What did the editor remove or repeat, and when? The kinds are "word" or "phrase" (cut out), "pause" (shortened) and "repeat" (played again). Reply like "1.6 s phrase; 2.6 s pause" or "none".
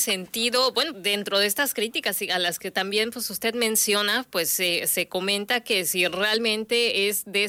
0.9 s word